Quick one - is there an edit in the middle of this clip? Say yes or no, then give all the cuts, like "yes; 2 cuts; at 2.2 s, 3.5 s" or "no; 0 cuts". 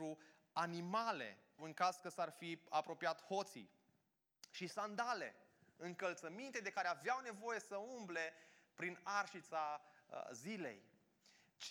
yes; 1 cut; at 1.6 s